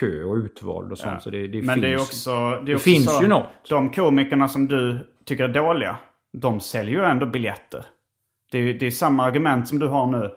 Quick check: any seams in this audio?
no; 0 cuts

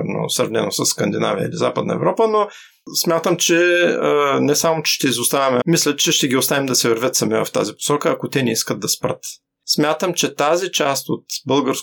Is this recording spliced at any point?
yes; 1 cut; at 5.6 s

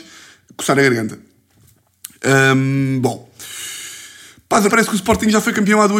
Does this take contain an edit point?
yes; 1 cut; at 4.7 s

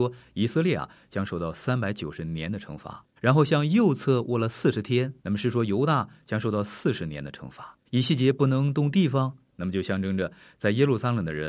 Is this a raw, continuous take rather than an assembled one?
no; 3 cuts; at 3.2 s, 5.2 s, 7.9 s

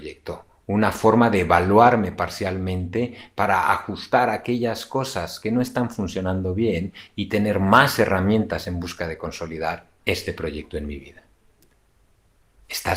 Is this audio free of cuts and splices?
yes; 0 cuts

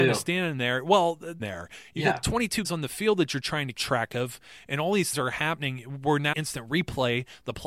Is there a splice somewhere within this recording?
yes; 5 cuts; at 1.4 s, 2.6 s, 3.7 s, 5.1 s, 6.3 s

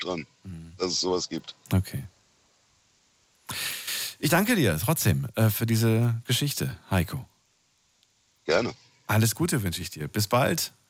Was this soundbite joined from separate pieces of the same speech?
no; 0 cuts

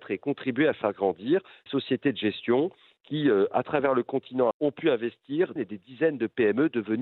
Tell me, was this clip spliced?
yes; 3 cuts; at 1.7 s, 4.5 s, 5.6 s

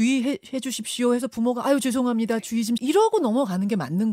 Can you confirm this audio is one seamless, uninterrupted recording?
no; 1 cut; at 2.8 s

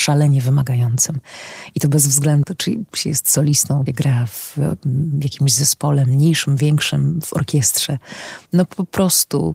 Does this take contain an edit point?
yes; 3 cuts; at 2.4 s, 3.9 s, 8.5 s

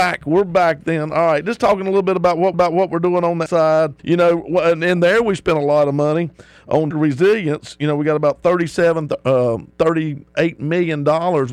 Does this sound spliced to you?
yes; 5 cuts; at 2.5 s, 3.5 s, 4.0 s, 6.9 s, 9.7 s

